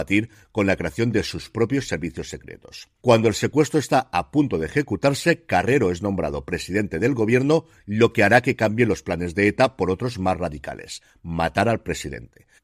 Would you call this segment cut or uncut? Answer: uncut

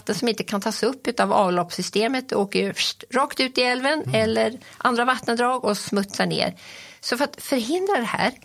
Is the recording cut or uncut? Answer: uncut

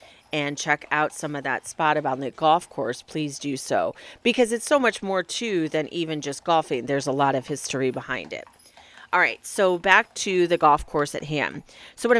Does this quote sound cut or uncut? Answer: uncut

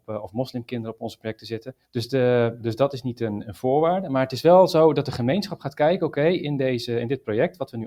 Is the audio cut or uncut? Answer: cut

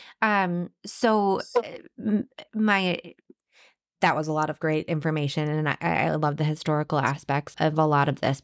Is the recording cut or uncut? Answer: cut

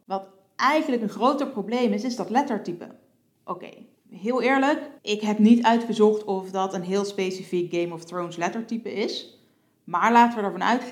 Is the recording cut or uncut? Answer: cut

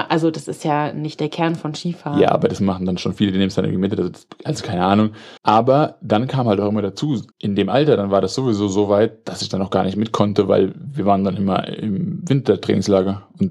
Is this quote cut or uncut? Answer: cut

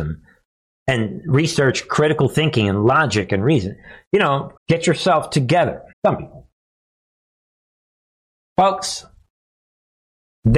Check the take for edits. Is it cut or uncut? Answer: cut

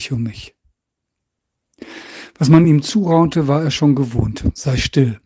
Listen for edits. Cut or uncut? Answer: uncut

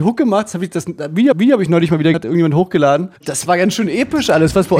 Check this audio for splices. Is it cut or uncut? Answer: cut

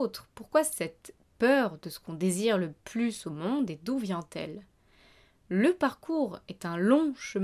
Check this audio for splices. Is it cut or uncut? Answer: uncut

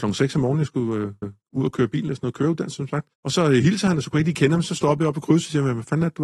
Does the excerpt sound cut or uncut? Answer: cut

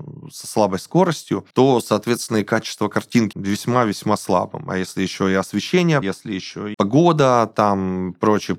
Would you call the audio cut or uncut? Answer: cut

